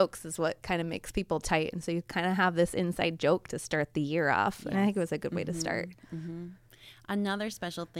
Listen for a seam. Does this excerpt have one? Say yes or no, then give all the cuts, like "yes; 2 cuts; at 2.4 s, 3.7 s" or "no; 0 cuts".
no; 0 cuts